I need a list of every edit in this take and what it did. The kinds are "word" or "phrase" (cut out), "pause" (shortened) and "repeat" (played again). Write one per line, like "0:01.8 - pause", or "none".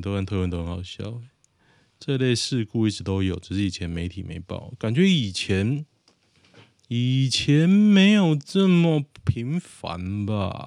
none